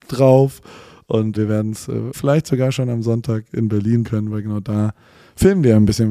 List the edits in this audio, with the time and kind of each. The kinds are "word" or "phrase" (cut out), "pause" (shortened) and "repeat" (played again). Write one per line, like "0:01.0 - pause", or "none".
0:01.3 - word
0:02.1 - word
0:04.0 - word

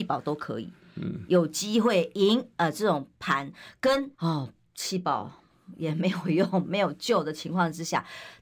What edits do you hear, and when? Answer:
0:04.1 - pause

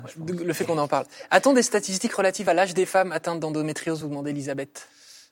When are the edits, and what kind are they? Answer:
none

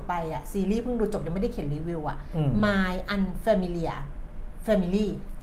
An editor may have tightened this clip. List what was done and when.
none

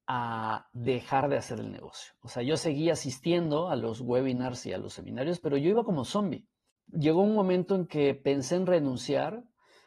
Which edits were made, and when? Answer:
none

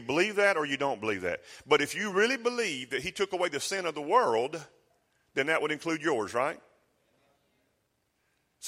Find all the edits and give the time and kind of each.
none

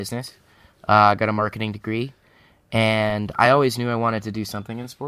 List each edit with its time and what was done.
none

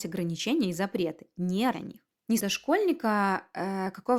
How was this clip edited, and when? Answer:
0:01.7 - word
0:02.4 - phrase

